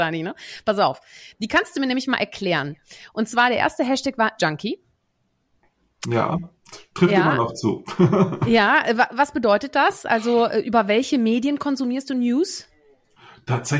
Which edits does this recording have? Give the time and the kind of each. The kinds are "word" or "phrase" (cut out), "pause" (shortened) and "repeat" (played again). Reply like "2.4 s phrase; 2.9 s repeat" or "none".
4.4 s word